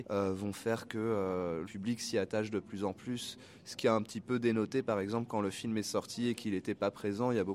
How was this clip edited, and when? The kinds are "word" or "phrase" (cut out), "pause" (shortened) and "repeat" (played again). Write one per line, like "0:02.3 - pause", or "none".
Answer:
0:01.6 - word